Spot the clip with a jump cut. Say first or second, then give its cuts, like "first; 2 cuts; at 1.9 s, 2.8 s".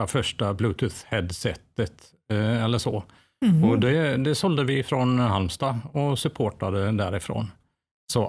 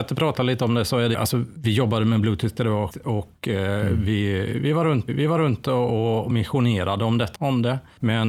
second; 6 cuts; at 1.1 s, 1.6 s, 2.6 s, 2.9 s, 5.1 s, 7.3 s